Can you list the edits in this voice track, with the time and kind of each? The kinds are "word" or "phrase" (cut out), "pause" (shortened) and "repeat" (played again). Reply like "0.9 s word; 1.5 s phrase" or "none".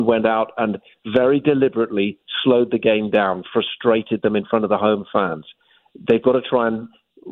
none

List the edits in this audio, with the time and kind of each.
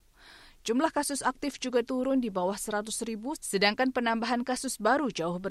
none

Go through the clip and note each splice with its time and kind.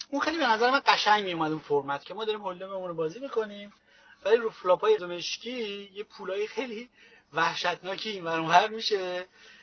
5.0 s word

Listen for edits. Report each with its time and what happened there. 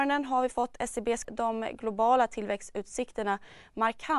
1.2 s phrase

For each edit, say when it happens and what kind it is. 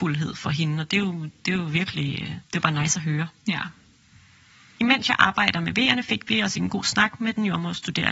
none

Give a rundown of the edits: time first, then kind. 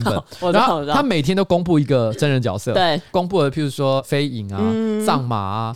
none

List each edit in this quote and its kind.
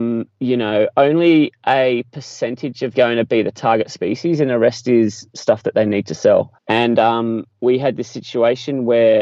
2.9 s phrase; 6.6 s pause

